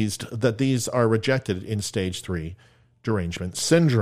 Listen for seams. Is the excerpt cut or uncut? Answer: uncut